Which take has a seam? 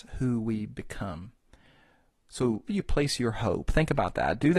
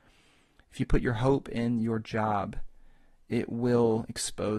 first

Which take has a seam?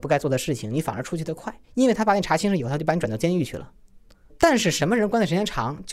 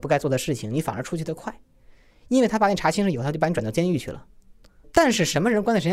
first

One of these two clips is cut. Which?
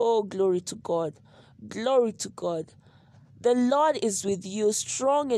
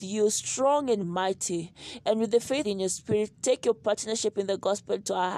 second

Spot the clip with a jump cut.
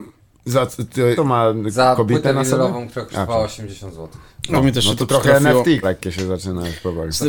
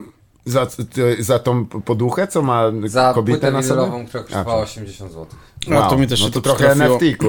first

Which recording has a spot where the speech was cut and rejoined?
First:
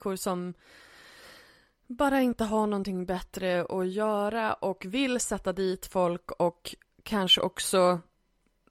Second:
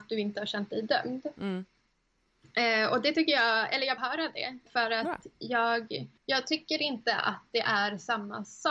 second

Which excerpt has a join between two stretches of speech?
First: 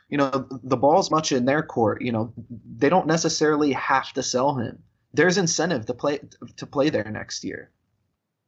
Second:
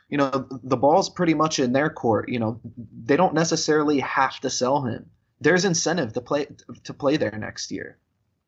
first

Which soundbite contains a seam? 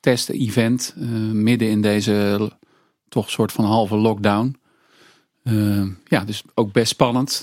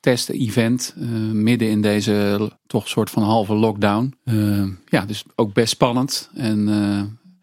second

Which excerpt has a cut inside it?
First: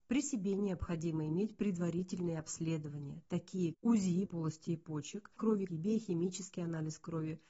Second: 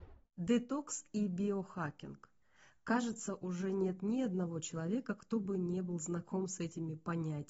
first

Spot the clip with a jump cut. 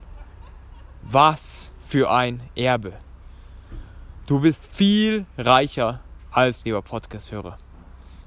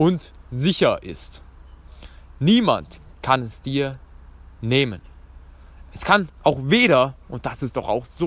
first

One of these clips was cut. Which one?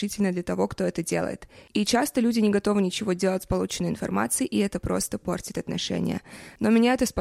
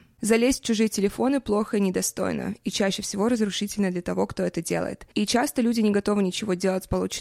second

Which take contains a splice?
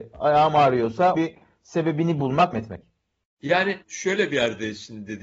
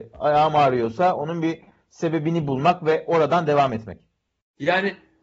first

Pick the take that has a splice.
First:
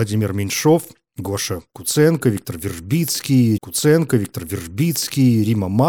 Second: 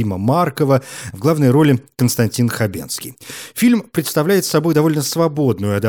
first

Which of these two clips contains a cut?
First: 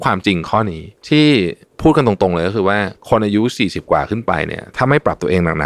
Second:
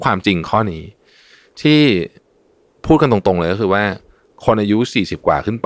first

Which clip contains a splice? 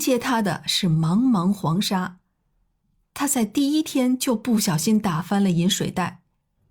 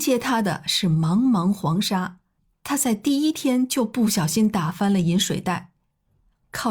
second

